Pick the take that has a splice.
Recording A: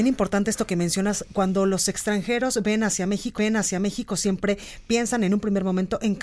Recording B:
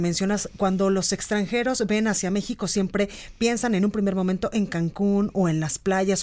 A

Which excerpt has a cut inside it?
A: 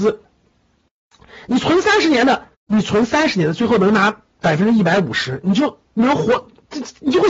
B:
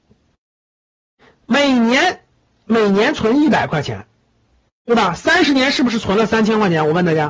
A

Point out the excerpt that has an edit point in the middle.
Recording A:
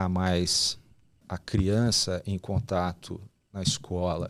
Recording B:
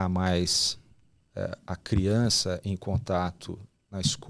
A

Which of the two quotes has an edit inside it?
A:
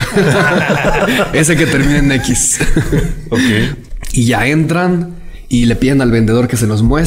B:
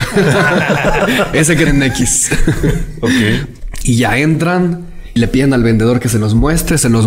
B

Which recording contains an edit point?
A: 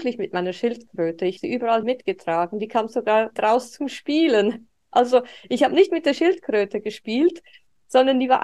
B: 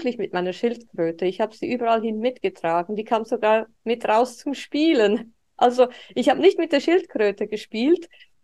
A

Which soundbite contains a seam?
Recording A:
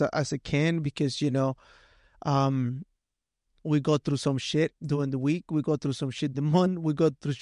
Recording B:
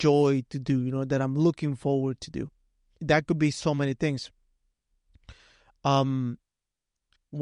A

